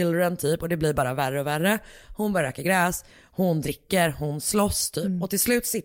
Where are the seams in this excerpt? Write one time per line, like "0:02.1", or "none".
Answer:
none